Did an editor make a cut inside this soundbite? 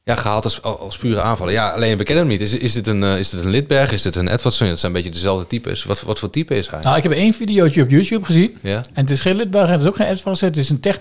no; 0 cuts

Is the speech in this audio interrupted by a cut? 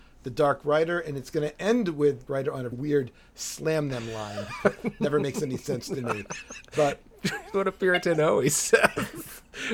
yes; 3 cuts; at 2.3 s, 2.7 s, 7.5 s

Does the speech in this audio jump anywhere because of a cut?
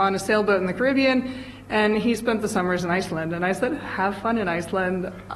no; 0 cuts

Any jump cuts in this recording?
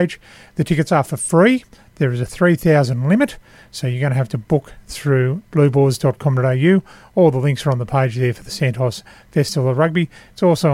no; 0 cuts

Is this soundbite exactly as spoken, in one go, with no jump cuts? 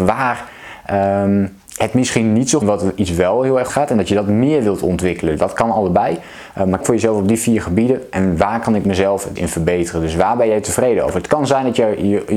no; 5 cuts; at 1.7 s, 2.6 s, 3.7 s, 6.8 s, 9.4 s

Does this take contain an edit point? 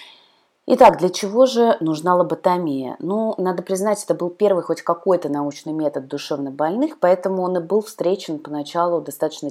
no; 0 cuts

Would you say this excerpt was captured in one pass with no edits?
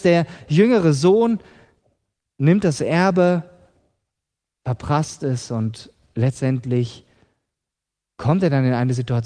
yes; 0 cuts

